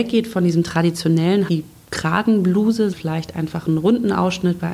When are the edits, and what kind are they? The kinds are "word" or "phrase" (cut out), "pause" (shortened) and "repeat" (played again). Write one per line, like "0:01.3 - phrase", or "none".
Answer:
0:01.5 - word
0:02.9 - word